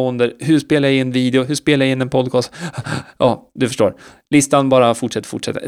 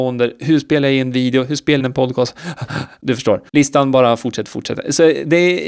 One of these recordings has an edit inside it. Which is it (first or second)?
second